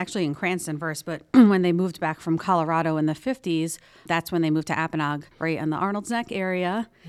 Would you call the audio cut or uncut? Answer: cut